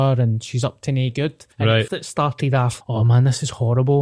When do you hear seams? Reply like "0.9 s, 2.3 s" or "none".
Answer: 1.5 s, 1.9 s, 2.8 s